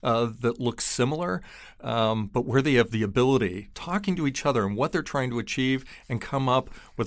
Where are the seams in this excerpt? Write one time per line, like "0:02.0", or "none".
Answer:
0:03.7

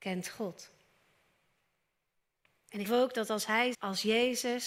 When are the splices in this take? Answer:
0:02.9
0:03.7

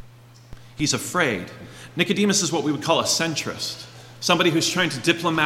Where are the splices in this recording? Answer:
none

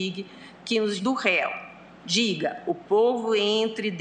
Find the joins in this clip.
0:01.0

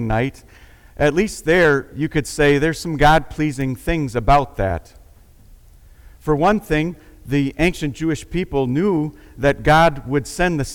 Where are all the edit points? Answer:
none

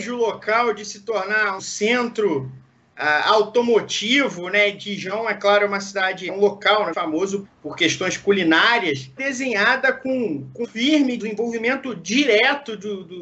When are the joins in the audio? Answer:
0:01.6
0:06.3
0:06.9
0:07.4
0:09.2
0:10.6
0:11.2

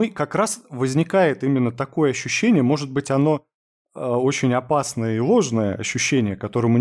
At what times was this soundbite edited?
none

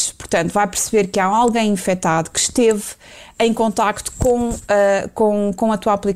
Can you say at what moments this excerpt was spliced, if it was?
none

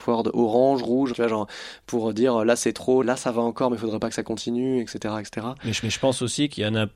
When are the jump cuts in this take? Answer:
0:01.1
0:03.0
0:05.8

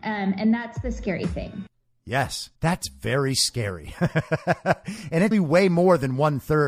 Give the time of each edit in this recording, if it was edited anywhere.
0:02.6
0:05.3

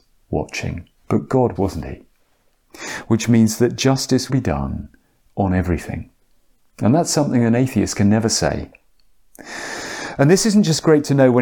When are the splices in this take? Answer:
0:01.0
0:01.6
0:04.3

